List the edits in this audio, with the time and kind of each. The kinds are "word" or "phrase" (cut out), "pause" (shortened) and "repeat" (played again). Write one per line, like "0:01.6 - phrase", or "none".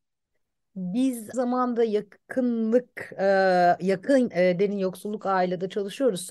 0:01.3 - word
0:04.3 - word